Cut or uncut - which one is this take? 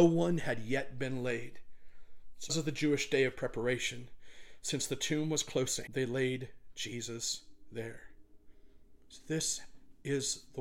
cut